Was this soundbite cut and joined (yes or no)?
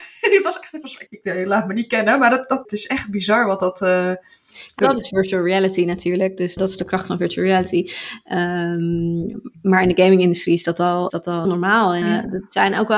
yes